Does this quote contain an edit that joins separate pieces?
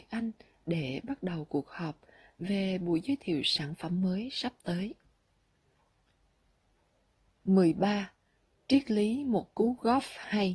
no; 0 cuts

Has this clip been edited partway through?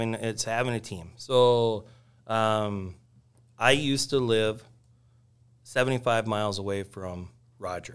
no; 0 cuts

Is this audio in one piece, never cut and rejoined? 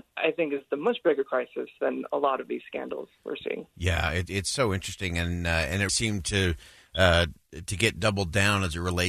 no; 2 cuts; at 3.7 s, 5.9 s

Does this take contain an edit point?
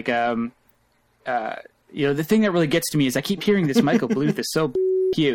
no; 0 cuts

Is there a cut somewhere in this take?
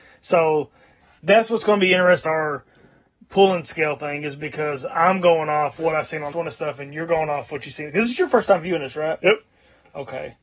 yes; 2 cuts; at 2.2 s, 6.3 s

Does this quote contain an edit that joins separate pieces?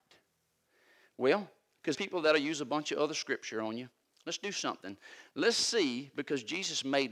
yes; 1 cut; at 1.9 s

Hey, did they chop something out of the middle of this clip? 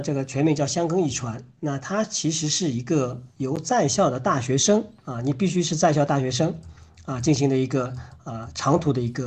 no; 0 cuts

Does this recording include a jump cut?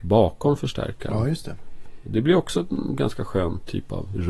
no; 0 cuts

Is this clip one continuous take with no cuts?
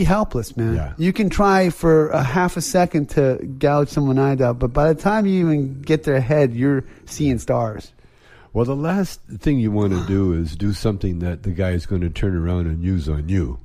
yes; 0 cuts

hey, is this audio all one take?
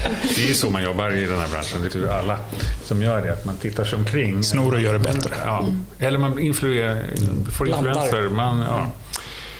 no; 1 cut; at 1.9 s

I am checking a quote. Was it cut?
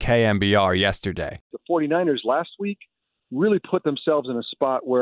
no; 0 cuts

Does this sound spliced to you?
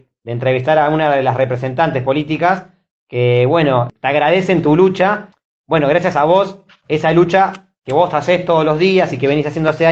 no; 0 cuts

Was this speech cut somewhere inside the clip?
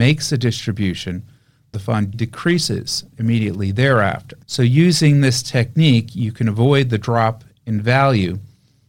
yes; 3 cuts; at 1.7 s, 2.1 s, 4.4 s

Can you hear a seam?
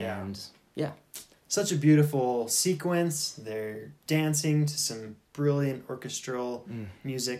yes; 1 cut; at 1.3 s

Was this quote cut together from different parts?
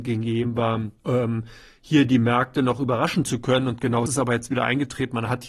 yes; 2 cuts; at 1.0 s, 4.1 s

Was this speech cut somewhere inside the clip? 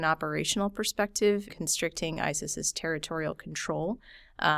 yes; 1 cut; at 1.5 s

